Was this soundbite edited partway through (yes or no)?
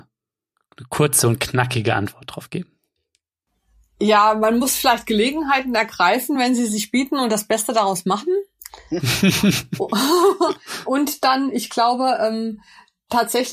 no